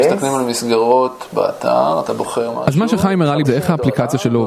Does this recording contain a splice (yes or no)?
yes